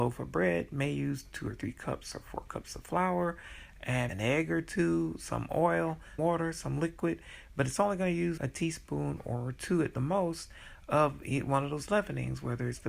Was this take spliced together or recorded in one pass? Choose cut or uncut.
cut